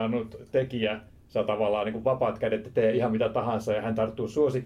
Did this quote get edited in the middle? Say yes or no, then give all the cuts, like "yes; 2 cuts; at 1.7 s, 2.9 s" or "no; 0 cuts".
no; 0 cuts